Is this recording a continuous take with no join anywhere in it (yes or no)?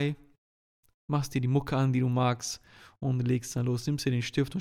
yes